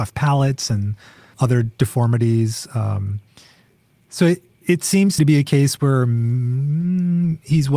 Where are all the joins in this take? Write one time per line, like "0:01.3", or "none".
0:01.3
0:04.6
0:05.2

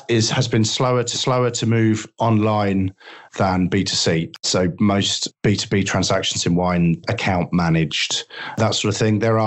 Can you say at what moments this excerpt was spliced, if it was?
0:01.1
0:03.3
0:07.0

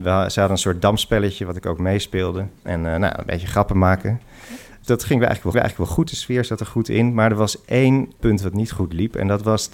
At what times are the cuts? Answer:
0:02.6
0:05.5
0:08.2

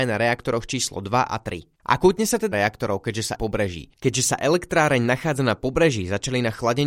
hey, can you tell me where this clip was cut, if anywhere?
0:01.8
0:02.5
0:03.4
0:03.9

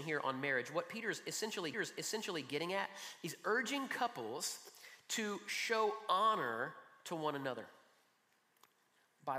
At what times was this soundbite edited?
0:01.7

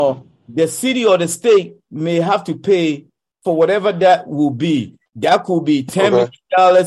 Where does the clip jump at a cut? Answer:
0:05.1

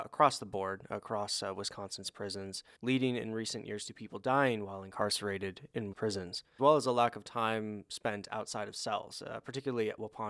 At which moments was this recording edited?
0:05.9
0:06.6

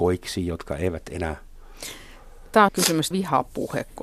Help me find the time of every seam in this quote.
0:02.7
0:03.1

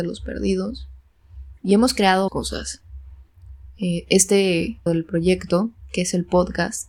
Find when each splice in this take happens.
0:01.6
0:02.3
0:04.9

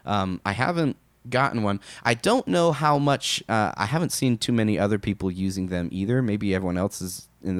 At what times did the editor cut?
0:01.1

